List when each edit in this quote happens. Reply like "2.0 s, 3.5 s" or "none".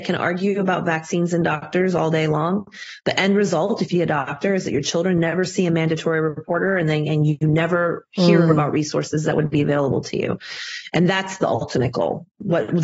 3.9 s